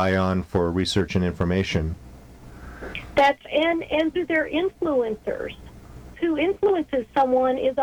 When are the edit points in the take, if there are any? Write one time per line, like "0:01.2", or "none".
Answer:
0:03.4
0:04.1
0:06.1

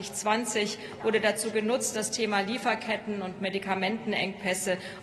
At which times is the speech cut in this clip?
none

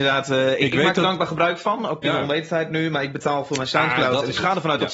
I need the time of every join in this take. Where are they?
0:02.0

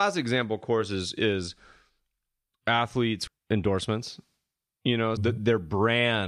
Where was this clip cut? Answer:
0:03.3
0:05.2

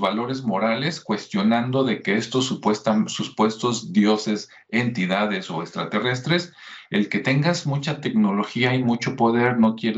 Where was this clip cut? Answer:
none

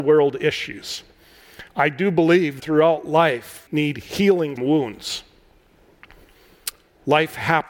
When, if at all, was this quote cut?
0:01.7
0:02.6
0:03.7
0:04.6

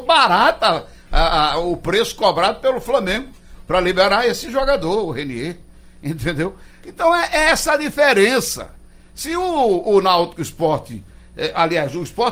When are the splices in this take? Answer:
none

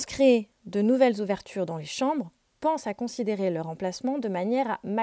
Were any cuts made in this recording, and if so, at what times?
none

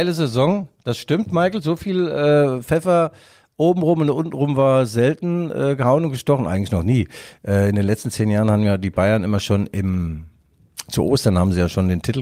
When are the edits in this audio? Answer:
none

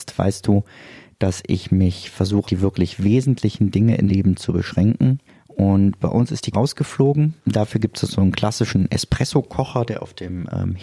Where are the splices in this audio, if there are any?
0:02.4
0:04.1
0:05.3
0:06.5
0:07.4

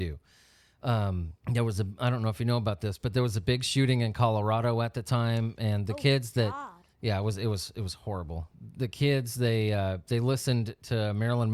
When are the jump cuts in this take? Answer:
0:01.4
0:06.9

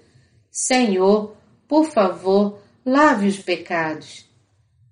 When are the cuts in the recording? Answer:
0:03.4

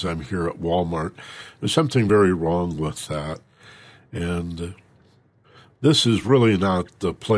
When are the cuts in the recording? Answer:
none

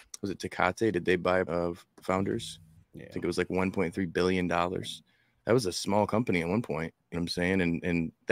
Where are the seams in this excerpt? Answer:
0:01.5
0:07.1

